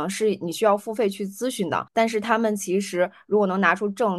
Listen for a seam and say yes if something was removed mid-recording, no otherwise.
yes